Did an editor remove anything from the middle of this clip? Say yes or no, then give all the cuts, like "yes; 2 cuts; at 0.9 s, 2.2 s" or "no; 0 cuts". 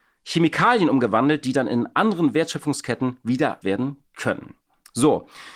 yes; 1 cut; at 3.6 s